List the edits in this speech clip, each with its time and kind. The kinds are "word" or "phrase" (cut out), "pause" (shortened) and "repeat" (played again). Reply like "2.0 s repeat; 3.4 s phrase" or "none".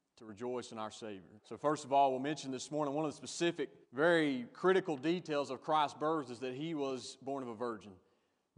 1.4 s pause; 3.8 s pause